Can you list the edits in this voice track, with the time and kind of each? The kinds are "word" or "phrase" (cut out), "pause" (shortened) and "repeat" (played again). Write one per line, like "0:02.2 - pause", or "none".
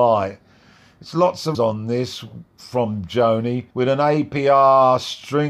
0:01.5 - word
0:03.7 - pause